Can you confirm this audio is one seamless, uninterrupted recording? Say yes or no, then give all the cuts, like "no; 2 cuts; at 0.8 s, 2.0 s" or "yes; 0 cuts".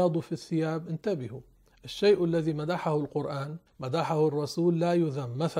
no; 1 cut; at 3.7 s